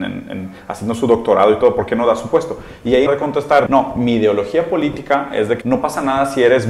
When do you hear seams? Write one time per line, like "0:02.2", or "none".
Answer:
0:03.1
0:03.7
0:05.6